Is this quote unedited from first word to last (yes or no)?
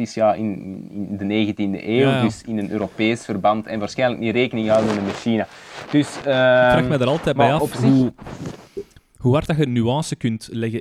yes